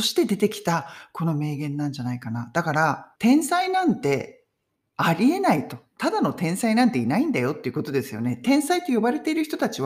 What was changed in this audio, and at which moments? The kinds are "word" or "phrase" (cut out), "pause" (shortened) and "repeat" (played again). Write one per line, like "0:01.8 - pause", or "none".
0:03.2 - pause
0:04.8 - pause